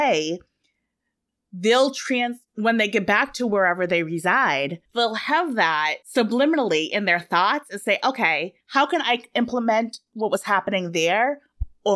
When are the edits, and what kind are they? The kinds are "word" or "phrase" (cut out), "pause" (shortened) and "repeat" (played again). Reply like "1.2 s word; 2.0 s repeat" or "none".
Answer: 4.9 s pause; 6.0 s pause; 8.6 s pause